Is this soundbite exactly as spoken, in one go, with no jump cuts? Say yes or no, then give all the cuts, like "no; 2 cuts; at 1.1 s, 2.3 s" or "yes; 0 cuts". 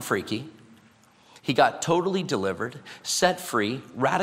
yes; 0 cuts